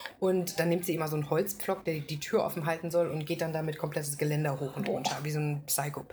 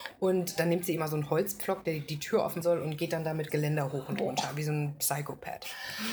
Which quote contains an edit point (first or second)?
second